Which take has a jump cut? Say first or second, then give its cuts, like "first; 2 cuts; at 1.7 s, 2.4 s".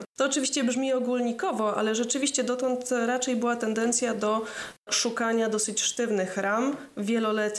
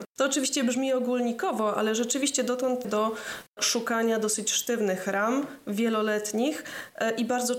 second; 1 cut; at 2.8 s